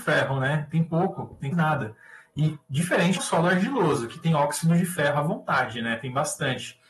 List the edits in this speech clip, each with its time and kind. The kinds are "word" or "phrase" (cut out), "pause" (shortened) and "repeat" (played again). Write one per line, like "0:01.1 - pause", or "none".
0:01.5 - word
0:03.2 - word